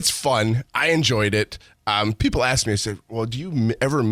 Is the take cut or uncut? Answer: uncut